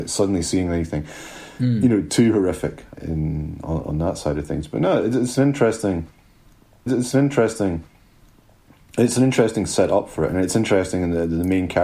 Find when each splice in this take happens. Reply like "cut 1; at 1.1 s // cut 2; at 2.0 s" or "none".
cut 1; at 2.9 s // cut 2; at 6.9 s